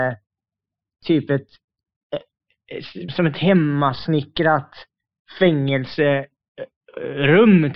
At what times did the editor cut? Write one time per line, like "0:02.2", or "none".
0:03.1

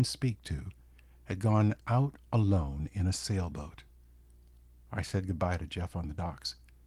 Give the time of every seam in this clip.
none

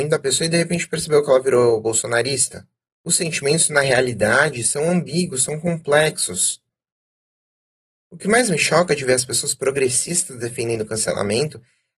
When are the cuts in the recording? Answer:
none

